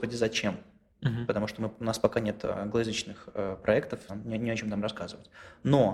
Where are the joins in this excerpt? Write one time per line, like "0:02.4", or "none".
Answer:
0:04.1